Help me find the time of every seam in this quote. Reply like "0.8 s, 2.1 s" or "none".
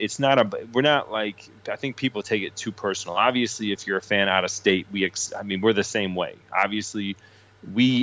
none

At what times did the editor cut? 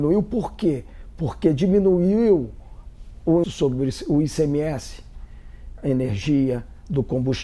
3.4 s, 5.8 s

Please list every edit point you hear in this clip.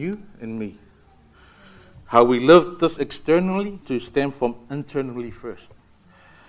3.0 s, 3.8 s

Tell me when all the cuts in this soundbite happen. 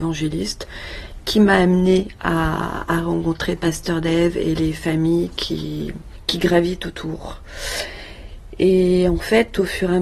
none

